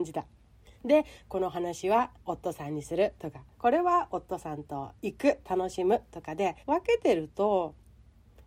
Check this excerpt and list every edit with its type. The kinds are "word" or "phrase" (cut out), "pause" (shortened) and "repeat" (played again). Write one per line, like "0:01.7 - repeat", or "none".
0:02.2 - pause
0:03.5 - pause
0:05.4 - phrase
0:06.6 - pause